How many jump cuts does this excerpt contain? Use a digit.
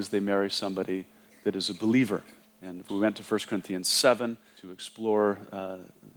2